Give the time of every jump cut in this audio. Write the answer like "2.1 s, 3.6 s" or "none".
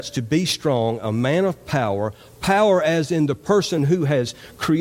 none

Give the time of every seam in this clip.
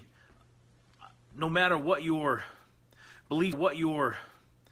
3.5 s

